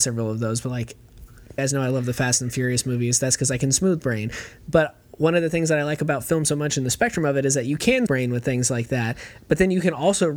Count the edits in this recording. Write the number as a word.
two